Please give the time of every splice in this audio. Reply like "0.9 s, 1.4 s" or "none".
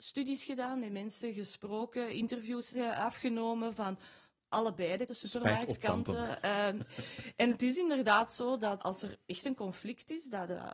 5.1 s, 8.8 s